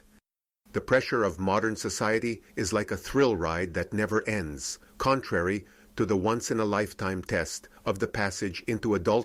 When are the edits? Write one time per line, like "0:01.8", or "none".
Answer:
0:02.5
0:04.9
0:07.8